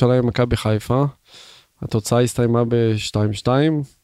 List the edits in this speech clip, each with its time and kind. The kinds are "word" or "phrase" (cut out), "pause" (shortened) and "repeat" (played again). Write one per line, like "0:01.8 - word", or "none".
none